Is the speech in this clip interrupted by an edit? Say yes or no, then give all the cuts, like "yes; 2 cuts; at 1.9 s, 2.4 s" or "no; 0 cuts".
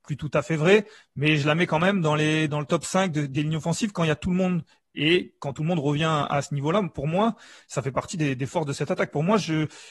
no; 0 cuts